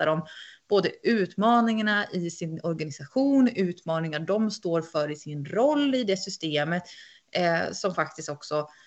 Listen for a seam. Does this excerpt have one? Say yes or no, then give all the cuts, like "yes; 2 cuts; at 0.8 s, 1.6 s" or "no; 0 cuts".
no; 0 cuts